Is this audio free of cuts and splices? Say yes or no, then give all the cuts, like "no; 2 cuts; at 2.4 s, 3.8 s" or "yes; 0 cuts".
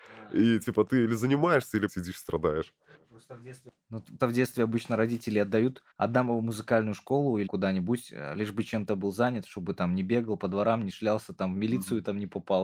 no; 5 cuts; at 1.9 s, 2.9 s, 4.2 s, 5.9 s, 7.5 s